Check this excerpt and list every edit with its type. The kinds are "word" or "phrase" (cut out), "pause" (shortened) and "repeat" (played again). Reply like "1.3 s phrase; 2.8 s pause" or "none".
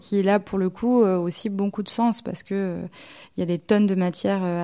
none